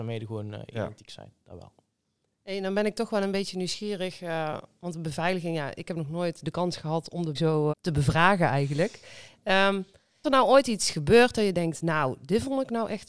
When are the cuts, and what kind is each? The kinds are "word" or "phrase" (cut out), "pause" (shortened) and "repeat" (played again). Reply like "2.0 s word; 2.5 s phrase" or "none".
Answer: 7.3 s word; 7.7 s word; 10.2 s word

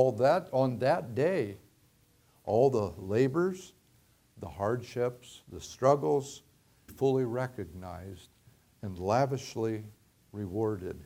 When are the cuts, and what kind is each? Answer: 6.9 s phrase

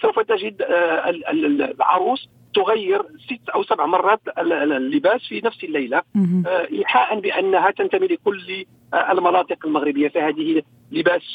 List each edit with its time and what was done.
none

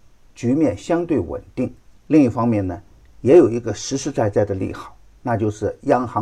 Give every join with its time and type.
1.8 s pause

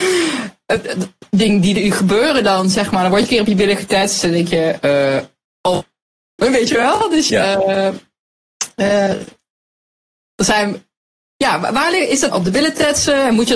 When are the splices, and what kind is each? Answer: 6.4 s word; 7.3 s word; 12.3 s word

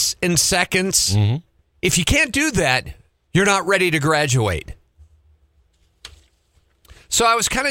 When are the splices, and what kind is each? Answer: none

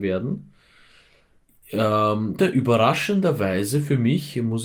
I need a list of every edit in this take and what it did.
2.4 s word

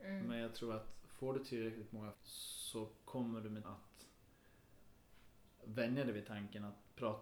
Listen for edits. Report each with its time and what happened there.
2.1 s word; 3.6 s word

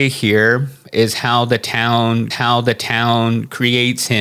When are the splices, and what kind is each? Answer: 2.3 s repeat

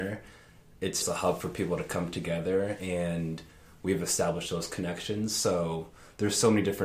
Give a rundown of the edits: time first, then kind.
1.0 s word

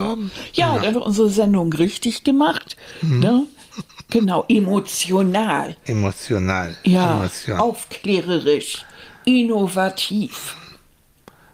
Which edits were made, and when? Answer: 0.9 s word

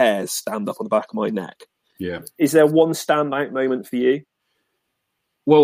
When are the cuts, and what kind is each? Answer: none

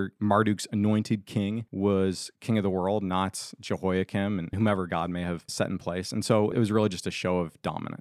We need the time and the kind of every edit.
none

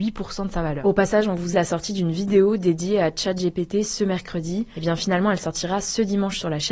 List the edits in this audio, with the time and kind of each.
1.5 s phrase

